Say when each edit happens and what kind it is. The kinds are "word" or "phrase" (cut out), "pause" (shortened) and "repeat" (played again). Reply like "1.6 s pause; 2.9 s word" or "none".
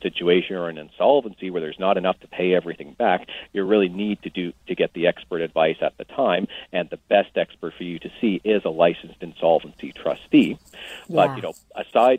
none